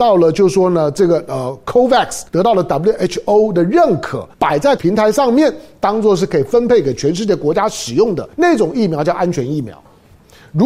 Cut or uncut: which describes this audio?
cut